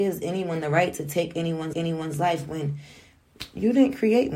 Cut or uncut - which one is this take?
cut